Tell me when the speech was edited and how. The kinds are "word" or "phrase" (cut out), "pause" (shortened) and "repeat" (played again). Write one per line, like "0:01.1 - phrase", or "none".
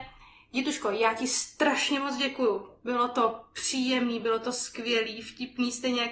none

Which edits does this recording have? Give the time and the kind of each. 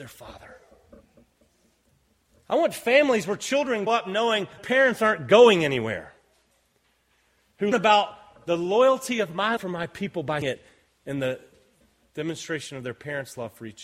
0:03.9 - word
0:04.6 - word
0:07.7 - word
0:09.6 - word
0:10.4 - word

